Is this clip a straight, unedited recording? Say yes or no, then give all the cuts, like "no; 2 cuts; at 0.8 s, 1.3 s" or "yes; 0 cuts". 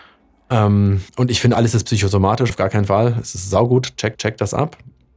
no; 4 cuts; at 1.1 s, 1.5 s, 2.5 s, 4.1 s